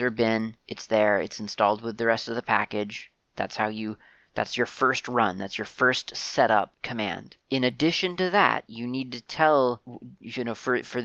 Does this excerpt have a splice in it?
no; 0 cuts

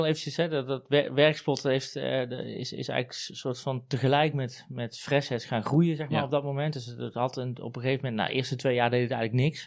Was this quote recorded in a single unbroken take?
yes; 0 cuts

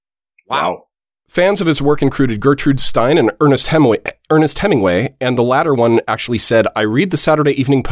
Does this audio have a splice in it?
no; 0 cuts

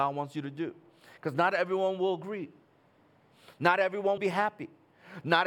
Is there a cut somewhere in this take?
yes; 1 cut; at 4.2 s

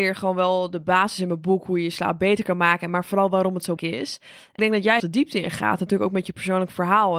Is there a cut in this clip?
yes; 3 cuts; at 3.8 s, 4.6 s, 5.0 s

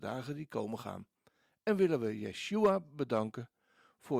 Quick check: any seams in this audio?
no; 0 cuts

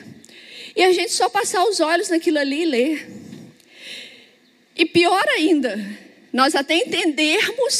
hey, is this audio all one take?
yes; 0 cuts

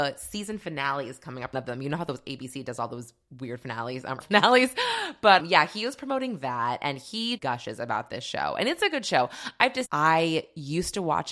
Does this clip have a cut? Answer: yes; 5 cuts; at 1.5 s, 4.2 s, 5.4 s, 7.4 s, 9.8 s

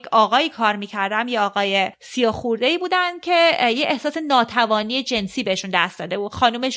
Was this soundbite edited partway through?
yes; 1 cut; at 1.9 s

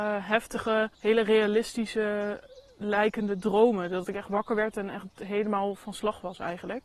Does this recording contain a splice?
yes; 1 cut; at 0.9 s

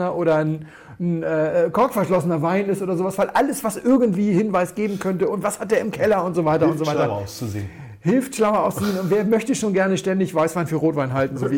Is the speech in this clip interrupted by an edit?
no; 0 cuts

